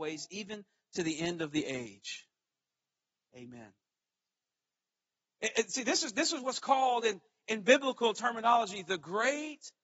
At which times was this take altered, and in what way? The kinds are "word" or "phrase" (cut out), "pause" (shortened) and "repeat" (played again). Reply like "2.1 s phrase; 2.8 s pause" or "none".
none